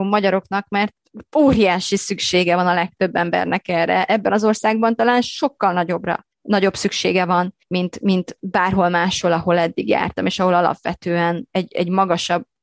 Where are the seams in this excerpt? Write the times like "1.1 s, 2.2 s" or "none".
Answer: 6.3 s, 7.6 s